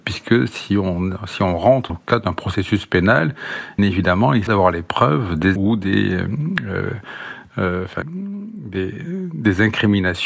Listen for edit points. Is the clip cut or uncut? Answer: cut